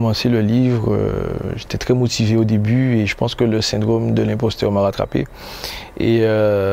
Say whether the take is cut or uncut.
uncut